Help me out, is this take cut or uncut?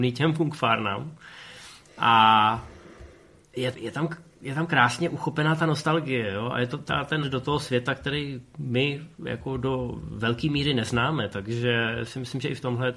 cut